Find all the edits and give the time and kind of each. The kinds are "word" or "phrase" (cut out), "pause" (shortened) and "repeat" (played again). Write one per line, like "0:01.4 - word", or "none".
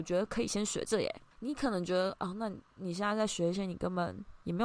0:01.3 - pause
0:02.7 - pause